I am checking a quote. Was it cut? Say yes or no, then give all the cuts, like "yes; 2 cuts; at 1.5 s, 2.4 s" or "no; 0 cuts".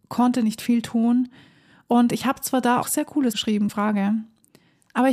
yes; 3 cuts; at 2.8 s, 3.3 s, 3.7 s